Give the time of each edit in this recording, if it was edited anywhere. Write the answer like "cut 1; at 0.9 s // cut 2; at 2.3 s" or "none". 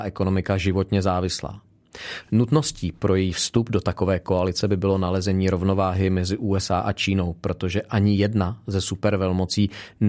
none